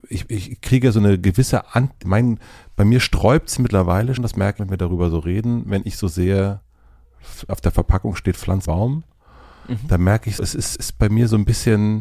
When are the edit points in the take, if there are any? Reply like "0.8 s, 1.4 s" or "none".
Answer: 2.0 s, 3.6 s, 4.2 s, 4.6 s, 7.5 s, 8.7 s, 10.4 s, 10.8 s